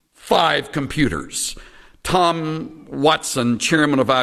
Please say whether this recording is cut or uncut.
uncut